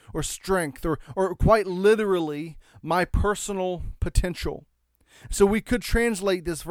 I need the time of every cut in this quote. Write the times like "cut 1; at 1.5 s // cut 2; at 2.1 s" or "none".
none